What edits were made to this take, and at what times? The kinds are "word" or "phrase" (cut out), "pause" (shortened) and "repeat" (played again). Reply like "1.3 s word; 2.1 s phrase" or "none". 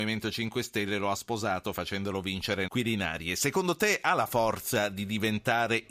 2.7 s word